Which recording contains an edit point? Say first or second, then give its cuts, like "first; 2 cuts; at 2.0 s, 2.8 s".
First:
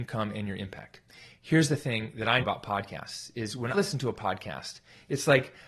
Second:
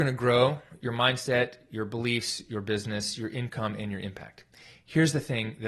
first; 2 cuts; at 2.4 s, 3.7 s